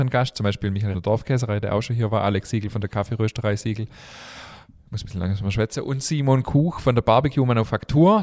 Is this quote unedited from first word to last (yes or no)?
no